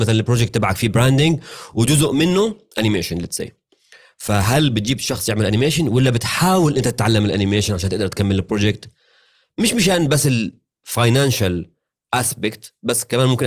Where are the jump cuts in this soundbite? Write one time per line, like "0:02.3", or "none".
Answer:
none

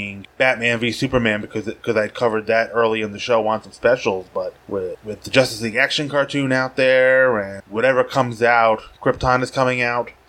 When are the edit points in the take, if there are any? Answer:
none

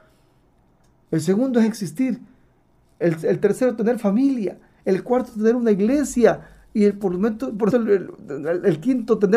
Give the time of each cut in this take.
0:07.7

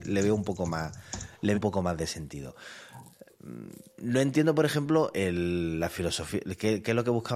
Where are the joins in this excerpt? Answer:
0:01.5
0:05.1

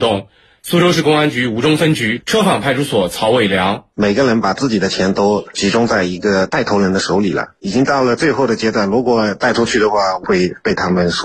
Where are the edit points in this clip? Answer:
0:03.9

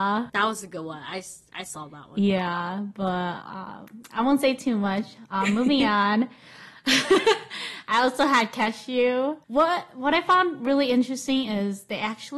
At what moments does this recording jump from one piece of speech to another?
none

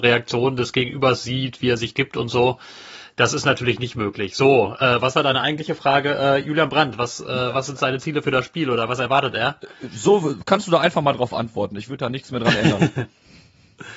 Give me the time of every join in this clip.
none

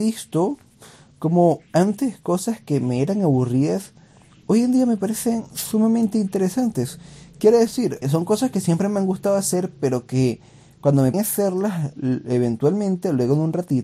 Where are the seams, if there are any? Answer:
0:08.0
0:11.1

